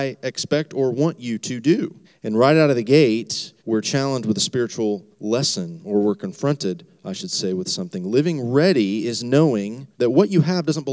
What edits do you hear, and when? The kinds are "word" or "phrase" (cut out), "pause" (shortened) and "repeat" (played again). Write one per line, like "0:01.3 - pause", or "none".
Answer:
0:02.0 - pause
0:03.6 - pause
0:05.1 - pause
0:09.9 - pause